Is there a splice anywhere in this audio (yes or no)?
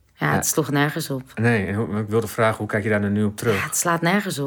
no